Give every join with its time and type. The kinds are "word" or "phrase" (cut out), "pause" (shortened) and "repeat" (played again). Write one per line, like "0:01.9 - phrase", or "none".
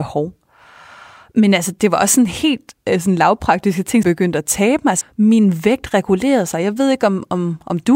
0:04.0 - phrase
0:05.0 - word